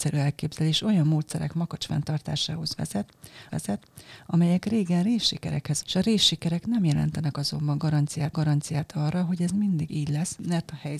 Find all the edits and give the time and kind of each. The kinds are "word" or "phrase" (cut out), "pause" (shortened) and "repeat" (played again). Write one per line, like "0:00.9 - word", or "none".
0:03.5 - repeat
0:05.8 - word
0:08.3 - repeat
0:09.9 - word